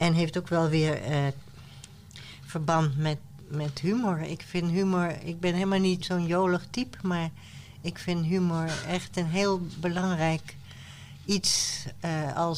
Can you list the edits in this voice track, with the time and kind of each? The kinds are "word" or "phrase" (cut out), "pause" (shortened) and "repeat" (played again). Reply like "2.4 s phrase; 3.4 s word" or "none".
6.0 s word